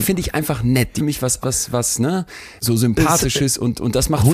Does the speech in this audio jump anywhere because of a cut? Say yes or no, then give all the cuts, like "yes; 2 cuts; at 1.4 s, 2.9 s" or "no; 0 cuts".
yes; 3 cuts; at 1.0 s, 1.4 s, 2.6 s